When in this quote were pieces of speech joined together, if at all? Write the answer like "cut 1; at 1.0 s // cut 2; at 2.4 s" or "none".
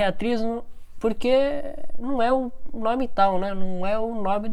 none